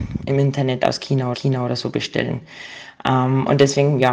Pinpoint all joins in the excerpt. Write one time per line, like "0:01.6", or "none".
0:01.3